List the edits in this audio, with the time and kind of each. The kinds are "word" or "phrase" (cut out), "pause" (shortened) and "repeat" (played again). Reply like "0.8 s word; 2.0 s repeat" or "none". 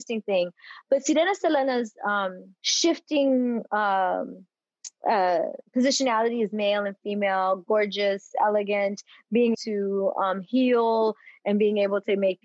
2.6 s pause; 9.5 s word